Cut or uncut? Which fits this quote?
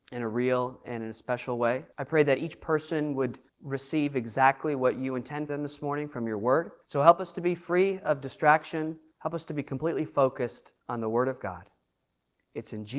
cut